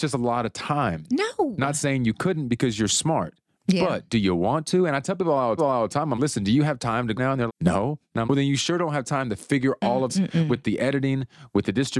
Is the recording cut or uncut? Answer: cut